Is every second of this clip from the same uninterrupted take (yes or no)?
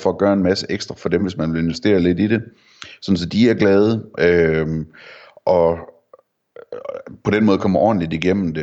yes